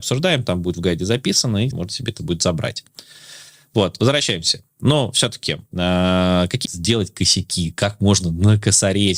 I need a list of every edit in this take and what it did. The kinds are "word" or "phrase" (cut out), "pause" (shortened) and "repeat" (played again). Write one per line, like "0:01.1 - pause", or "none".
0:01.7 - word
0:02.2 - word
0:06.6 - word